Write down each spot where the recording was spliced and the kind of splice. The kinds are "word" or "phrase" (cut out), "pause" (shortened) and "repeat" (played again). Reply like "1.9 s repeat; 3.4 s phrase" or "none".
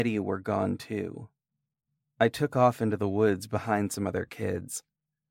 2.0 s pause